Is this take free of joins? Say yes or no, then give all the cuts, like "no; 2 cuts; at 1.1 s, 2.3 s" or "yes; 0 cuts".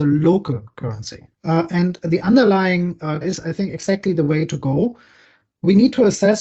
no; 2 cuts; at 1.3 s, 3.2 s